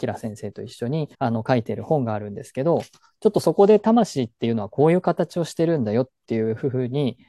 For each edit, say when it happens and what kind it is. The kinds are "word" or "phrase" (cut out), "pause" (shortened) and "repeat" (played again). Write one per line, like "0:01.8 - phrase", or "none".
0:01.1 - pause